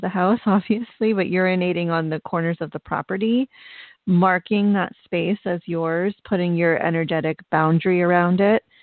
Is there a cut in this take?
no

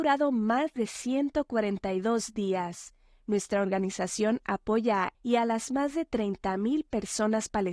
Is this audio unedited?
no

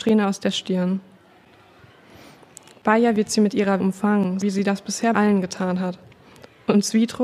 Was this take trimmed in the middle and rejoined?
yes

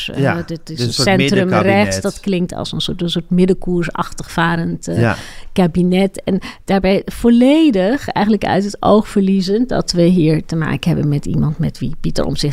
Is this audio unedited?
yes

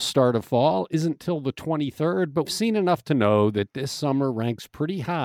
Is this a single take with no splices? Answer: no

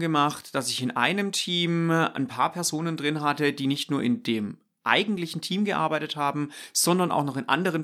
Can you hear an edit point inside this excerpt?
no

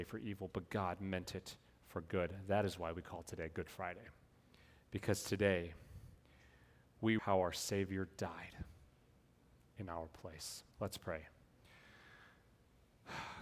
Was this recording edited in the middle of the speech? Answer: yes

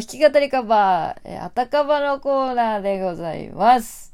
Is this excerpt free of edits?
yes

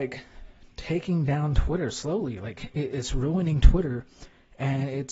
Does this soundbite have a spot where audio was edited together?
yes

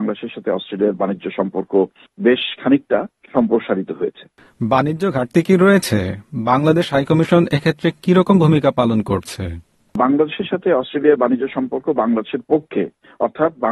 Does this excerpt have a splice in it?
no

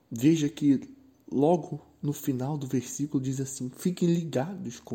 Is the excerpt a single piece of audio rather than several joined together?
yes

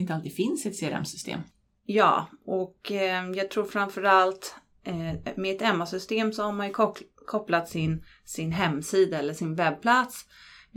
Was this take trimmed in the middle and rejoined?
no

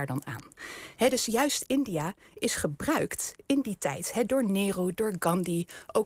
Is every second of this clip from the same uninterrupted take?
yes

